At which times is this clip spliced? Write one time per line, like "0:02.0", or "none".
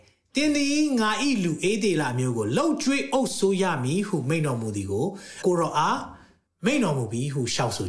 none